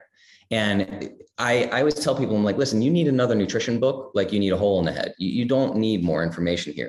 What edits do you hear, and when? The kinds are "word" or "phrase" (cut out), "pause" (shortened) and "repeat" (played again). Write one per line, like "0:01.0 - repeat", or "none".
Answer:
none